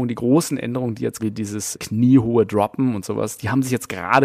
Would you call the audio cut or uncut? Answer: cut